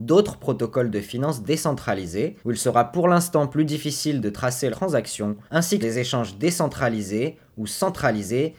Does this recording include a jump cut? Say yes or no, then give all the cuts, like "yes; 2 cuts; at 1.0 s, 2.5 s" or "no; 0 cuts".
yes; 4 cuts; at 2.4 s, 4.7 s, 5.5 s, 5.8 s